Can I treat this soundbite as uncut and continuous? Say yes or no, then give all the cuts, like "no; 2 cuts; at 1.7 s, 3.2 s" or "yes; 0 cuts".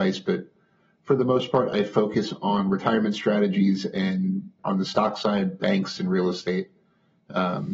no; 1 cut; at 4.6 s